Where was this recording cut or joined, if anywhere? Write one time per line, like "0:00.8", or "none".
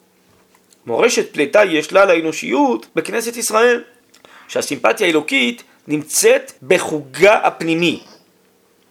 0:02.9
0:04.0
0:06.6